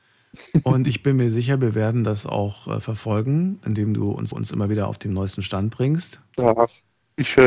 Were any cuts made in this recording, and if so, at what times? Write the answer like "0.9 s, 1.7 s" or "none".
4.3 s